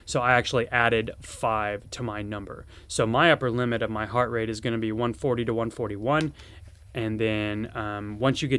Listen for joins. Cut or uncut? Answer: uncut